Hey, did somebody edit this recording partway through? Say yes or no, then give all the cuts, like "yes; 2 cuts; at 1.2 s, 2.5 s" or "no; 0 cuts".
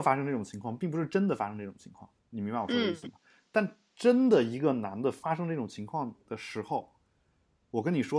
yes; 2 cuts; at 2.2 s, 6.2 s